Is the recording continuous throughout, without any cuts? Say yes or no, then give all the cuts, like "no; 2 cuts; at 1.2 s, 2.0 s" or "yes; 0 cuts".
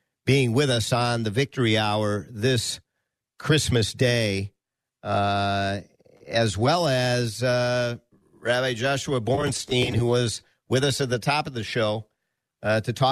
yes; 0 cuts